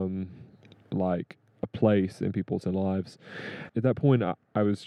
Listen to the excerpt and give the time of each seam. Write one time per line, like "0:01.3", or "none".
0:01.6
0:02.6
0:03.7